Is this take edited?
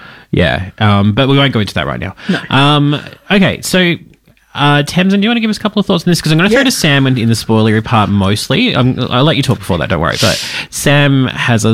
no; 0 cuts

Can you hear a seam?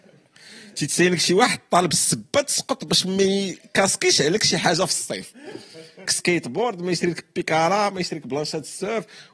yes; 1 cut; at 6.1 s

